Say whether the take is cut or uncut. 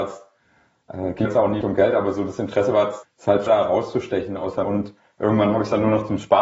cut